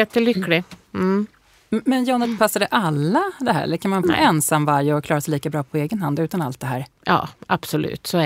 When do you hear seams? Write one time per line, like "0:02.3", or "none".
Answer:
0:04.0